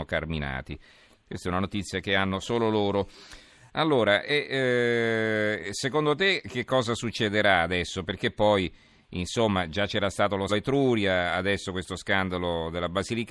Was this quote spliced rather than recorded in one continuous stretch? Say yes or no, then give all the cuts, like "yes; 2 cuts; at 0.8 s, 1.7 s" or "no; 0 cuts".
yes; 1 cut; at 10.5 s